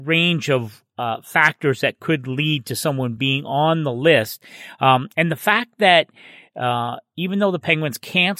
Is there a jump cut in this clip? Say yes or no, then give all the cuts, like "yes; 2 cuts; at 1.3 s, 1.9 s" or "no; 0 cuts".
no; 0 cuts